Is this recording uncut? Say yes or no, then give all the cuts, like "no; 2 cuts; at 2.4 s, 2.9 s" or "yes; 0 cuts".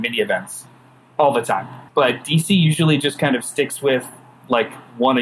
no; 1 cut; at 1.9 s